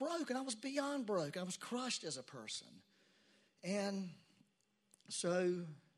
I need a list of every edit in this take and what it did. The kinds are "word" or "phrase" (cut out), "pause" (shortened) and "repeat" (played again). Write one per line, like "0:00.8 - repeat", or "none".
none